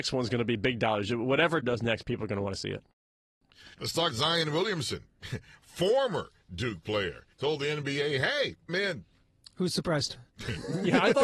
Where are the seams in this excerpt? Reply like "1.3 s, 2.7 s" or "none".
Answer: 1.6 s, 3.7 s, 4.1 s, 7.3 s, 8.7 s, 10.3 s